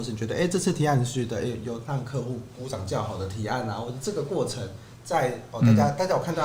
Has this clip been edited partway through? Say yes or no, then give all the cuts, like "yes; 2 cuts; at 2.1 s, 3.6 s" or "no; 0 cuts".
no; 0 cuts